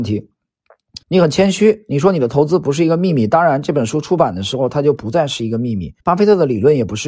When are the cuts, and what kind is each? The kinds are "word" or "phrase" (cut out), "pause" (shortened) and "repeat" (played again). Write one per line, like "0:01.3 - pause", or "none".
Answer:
0:01.0 - pause
0:06.0 - pause